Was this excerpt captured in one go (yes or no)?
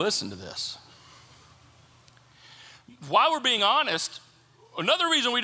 yes